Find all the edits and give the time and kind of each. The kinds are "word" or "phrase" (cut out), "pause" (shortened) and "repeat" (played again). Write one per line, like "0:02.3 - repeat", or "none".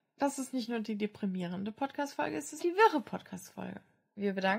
0:02.6 - word

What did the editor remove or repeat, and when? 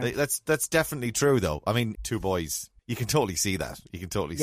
0:01.9 - phrase
0:02.8 - pause

